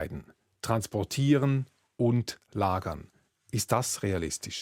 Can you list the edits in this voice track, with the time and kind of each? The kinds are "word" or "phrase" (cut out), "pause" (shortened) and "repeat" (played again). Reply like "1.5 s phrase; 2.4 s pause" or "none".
none